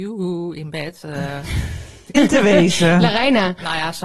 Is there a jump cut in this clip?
yes; 1 cut; at 2.1 s

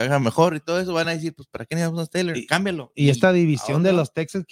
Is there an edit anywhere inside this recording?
no; 0 cuts

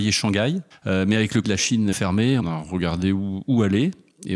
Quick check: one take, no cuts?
no; 3 cuts; at 1.4 s, 1.9 s, 2.4 s

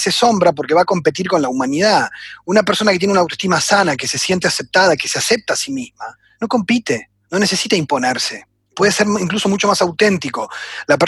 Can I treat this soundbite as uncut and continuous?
yes; 0 cuts

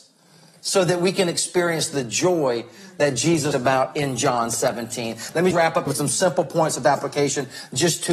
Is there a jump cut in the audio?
yes; 3 cuts; at 3.5 s, 5.5 s, 5.9 s

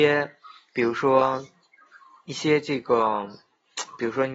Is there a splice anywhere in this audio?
no; 0 cuts

